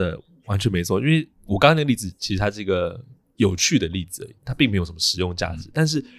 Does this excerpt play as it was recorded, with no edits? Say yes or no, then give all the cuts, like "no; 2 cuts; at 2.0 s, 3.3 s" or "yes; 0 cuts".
yes; 0 cuts